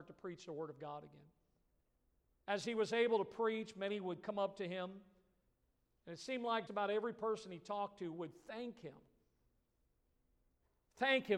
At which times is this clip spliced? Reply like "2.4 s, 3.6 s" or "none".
6.7 s